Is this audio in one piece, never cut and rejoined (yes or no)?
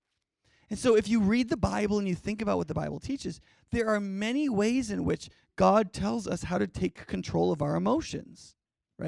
yes